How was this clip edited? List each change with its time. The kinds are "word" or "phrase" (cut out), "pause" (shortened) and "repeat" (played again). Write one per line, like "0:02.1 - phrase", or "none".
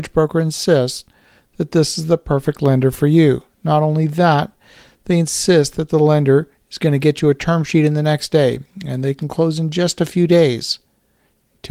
none